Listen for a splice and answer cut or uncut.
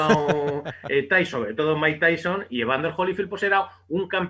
uncut